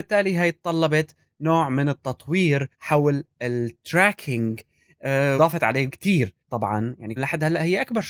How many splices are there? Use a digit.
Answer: 5